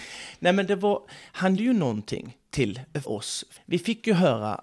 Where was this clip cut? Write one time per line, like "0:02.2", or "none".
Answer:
0:01.6
0:03.0
0:03.6